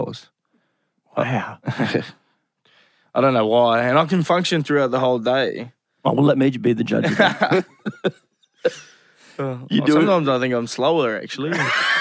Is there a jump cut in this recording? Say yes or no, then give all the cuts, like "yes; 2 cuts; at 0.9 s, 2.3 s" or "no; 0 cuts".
no; 0 cuts